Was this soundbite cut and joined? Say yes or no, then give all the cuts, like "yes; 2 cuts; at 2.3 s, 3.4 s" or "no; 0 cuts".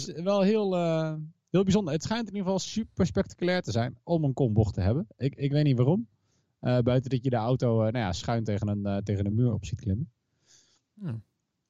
no; 0 cuts